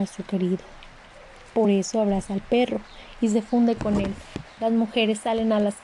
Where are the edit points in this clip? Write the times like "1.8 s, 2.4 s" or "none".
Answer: none